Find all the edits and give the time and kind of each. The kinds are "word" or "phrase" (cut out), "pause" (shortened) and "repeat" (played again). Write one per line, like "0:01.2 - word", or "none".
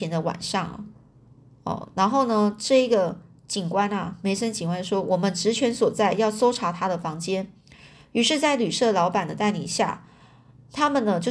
none